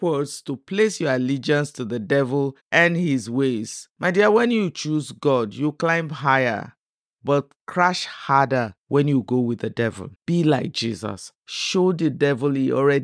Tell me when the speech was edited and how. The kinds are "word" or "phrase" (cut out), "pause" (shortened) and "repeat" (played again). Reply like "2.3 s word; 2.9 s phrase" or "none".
2.6 s pause; 3.9 s pause; 7.6 s pause; 8.8 s pause; 10.2 s pause; 11.4 s pause

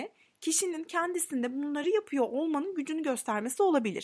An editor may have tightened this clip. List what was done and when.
none

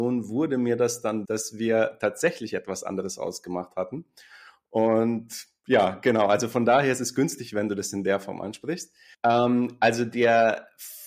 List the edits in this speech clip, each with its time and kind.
1.2 s word; 9.1 s pause

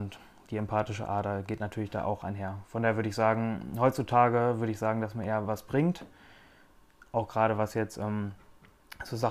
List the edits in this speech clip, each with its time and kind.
none

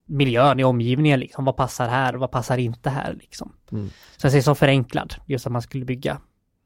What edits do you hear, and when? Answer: none

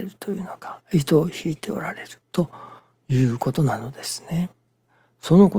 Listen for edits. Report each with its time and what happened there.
2.2 s pause

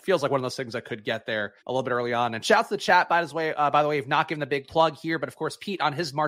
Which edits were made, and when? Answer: 1.6 s pause

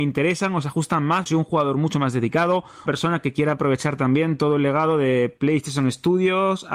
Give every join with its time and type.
1.3 s word; 2.9 s phrase

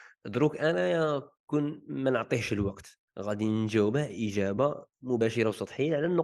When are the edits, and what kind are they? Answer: 1.4 s pause; 3.1 s pause

